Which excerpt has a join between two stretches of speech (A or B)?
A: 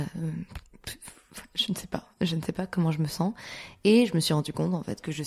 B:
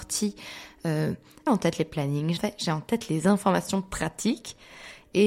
B